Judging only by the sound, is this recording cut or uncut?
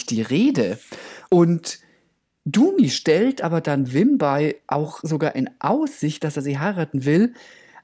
uncut